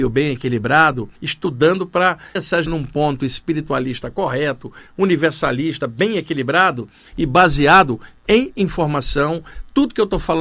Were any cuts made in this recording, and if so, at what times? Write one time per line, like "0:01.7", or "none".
0:01.2
0:02.4
0:02.7